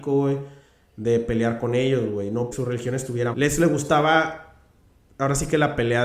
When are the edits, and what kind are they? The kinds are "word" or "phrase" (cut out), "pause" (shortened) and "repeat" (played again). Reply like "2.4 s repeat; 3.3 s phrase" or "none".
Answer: 2.5 s word; 3.3 s phrase